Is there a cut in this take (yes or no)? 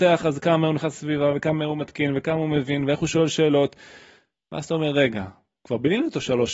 no